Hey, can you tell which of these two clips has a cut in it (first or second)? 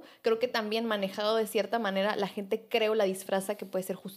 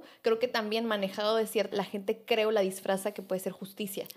second